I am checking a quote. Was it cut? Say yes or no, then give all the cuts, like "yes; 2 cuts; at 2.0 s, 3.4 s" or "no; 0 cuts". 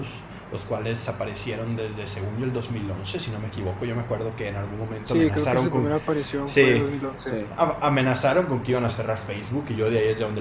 no; 0 cuts